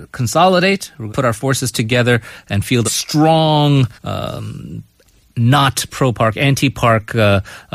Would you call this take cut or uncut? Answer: cut